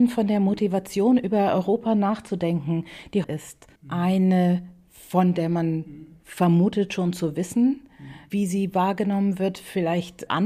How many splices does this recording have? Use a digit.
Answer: 2